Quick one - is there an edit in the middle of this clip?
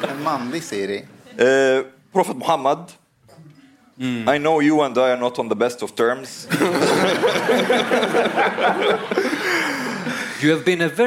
no; 0 cuts

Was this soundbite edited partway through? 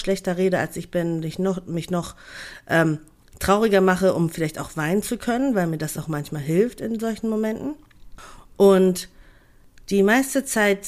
no; 0 cuts

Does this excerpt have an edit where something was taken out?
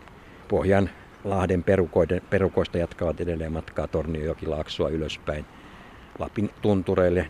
no; 0 cuts

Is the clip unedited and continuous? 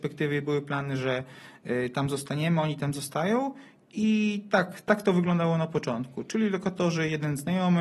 yes; 0 cuts

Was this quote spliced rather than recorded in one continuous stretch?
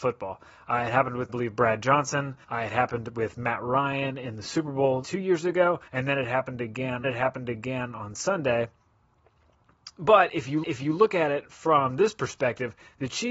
yes; 6 cuts; at 1.3 s, 2.4 s, 5.0 s, 5.9 s, 7.0 s, 10.6 s

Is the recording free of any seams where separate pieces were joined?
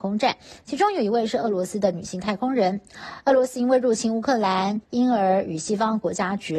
no; 1 cut; at 4.8 s

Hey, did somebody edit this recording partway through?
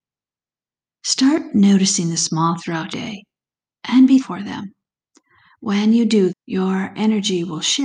yes; 4 cuts; at 2.6 s, 2.9 s, 4.2 s, 6.3 s

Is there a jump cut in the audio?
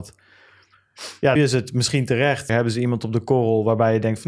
yes; 2 cuts; at 1.4 s, 2.5 s

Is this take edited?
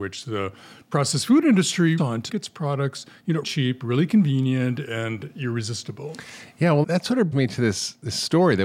yes; 5 cuts; at 2.0 s, 2.3 s, 3.4 s, 6.8 s, 7.3 s

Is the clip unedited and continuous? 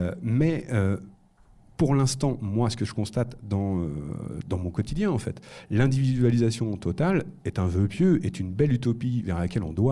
yes; 0 cuts

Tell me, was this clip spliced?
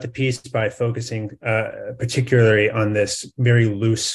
no; 0 cuts

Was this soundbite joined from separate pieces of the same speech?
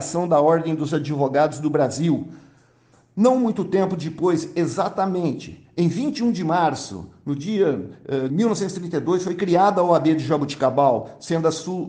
yes; 1 cut; at 8.3 s

